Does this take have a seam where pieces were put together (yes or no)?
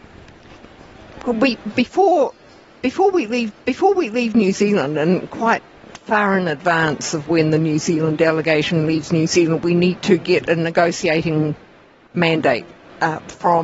yes